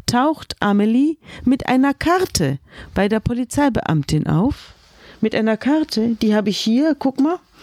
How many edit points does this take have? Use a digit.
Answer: 0